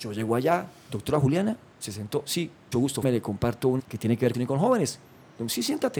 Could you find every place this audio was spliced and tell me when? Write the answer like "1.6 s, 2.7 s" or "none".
1.7 s, 2.7 s, 3.0 s, 3.8 s, 4.3 s